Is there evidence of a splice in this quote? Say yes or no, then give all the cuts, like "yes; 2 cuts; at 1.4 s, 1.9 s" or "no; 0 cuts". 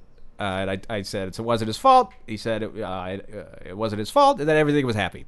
no; 0 cuts